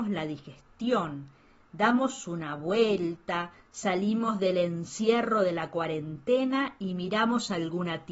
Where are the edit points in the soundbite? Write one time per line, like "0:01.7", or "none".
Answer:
none